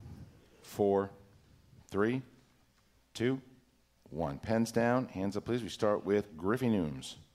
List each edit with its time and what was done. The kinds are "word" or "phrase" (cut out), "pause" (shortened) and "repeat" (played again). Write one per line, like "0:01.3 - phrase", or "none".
none